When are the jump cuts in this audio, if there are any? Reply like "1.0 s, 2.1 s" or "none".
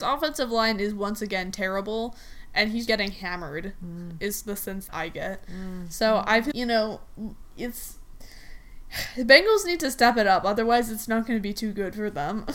2.9 s, 4.9 s, 6.5 s